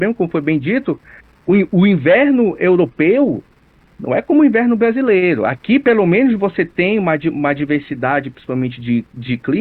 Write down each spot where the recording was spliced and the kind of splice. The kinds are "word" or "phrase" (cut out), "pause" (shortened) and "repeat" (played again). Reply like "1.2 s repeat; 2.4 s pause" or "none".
none